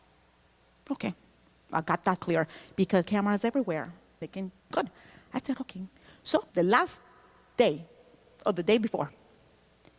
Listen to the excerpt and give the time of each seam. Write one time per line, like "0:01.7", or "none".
0:02.2
0:03.0
0:04.2
0:04.7
0:06.5